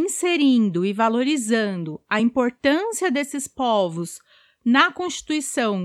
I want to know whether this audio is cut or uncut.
uncut